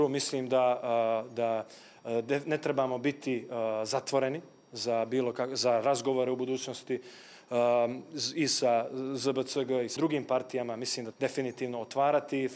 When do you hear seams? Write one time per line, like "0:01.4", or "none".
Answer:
0:10.0
0:11.1

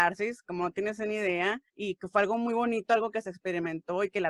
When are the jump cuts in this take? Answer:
0:01.7

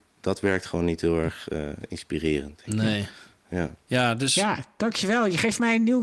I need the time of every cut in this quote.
none

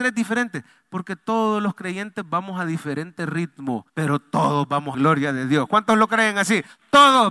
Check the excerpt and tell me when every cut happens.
0:03.9
0:04.9

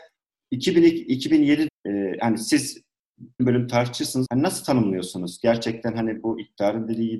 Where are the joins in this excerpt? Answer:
0:01.7
0:03.4
0:04.3

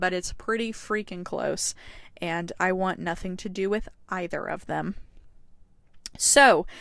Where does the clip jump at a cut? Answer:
none

